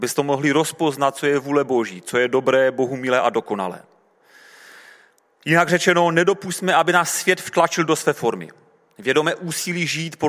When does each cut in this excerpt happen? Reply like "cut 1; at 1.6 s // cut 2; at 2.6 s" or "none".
none

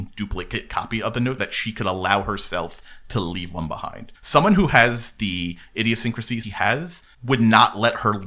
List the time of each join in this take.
cut 1; at 1.4 s // cut 2; at 4.2 s // cut 3; at 6.4 s

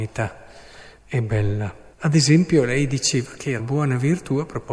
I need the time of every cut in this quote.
cut 1; at 1.0 s // cut 2; at 1.9 s // cut 3; at 3.6 s

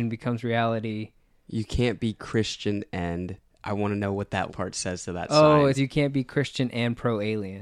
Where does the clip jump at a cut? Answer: cut 1; at 4.5 s // cut 2; at 5.7 s

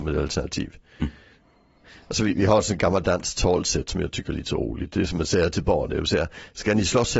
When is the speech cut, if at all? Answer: none

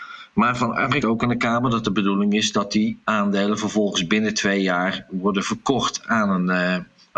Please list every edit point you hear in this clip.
cut 1; at 1.0 s // cut 2; at 3.0 s

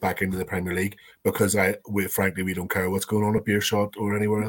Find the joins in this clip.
none

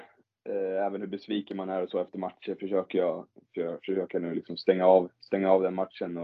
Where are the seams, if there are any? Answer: none

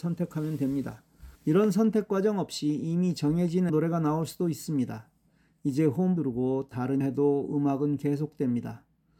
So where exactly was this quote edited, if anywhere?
cut 1; at 1.3 s // cut 2; at 3.7 s // cut 3; at 6.2 s // cut 4; at 7.0 s

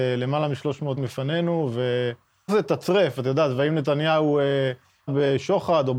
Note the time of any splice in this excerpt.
cut 1; at 1.0 s // cut 2; at 2.5 s // cut 3; at 5.1 s

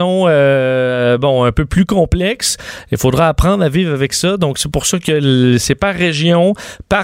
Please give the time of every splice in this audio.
none

